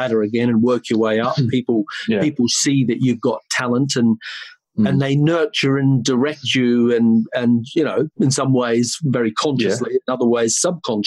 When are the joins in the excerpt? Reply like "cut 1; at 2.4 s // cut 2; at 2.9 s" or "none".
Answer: cut 1; at 8.1 s

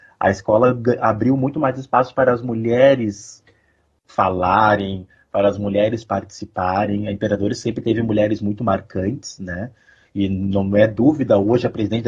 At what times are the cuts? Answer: none

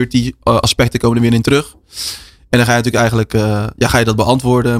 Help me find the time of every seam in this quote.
none

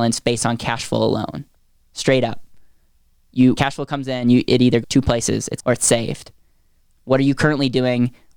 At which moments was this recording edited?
cut 1; at 3.6 s // cut 2; at 4.8 s // cut 3; at 5.6 s

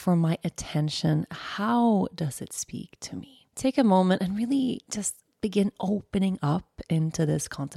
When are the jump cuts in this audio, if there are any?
cut 1; at 3.5 s

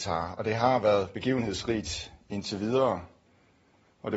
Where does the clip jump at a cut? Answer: none

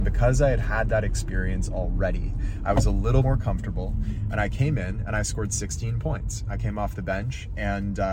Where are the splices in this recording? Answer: cut 1; at 3.2 s

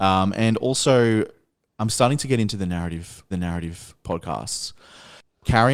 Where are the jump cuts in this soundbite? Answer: cut 1; at 3.3 s

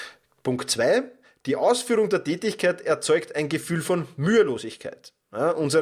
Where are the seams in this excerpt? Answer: none

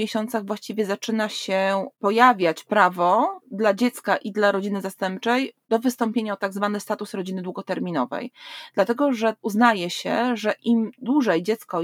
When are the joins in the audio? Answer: none

